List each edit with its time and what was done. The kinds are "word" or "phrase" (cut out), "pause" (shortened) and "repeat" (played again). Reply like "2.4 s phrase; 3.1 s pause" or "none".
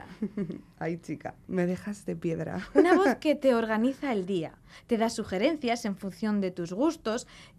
none